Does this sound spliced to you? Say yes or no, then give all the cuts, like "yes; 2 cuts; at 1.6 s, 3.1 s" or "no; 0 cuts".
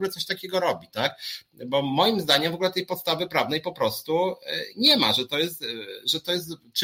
no; 0 cuts